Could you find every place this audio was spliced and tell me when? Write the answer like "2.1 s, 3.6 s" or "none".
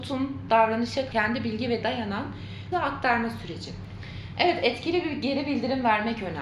1.1 s, 1.8 s, 2.7 s